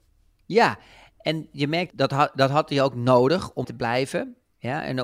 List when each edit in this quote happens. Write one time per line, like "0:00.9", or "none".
0:01.9
0:03.6